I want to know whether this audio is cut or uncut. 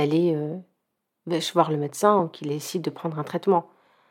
uncut